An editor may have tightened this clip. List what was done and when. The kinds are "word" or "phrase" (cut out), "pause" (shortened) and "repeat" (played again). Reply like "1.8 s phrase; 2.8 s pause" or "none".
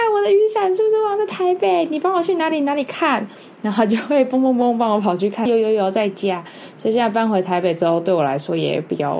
5.5 s phrase